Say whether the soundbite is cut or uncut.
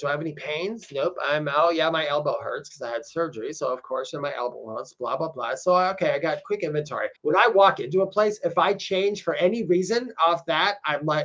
cut